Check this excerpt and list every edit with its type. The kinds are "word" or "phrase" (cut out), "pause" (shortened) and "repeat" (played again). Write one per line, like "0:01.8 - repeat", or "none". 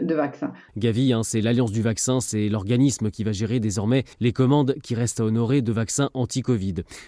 0:04.1 - pause